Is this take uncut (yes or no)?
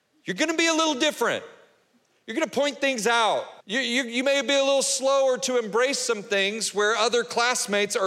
no